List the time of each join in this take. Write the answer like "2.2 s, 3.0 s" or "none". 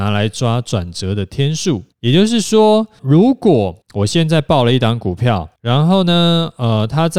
1.9 s, 3.0 s, 3.8 s, 5.6 s